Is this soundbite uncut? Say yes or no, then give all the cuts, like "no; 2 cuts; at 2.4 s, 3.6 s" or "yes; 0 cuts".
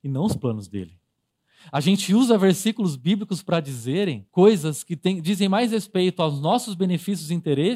no; 1 cut; at 4.3 s